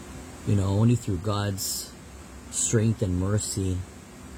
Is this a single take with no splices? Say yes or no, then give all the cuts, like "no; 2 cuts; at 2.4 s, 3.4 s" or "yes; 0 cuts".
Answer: yes; 0 cuts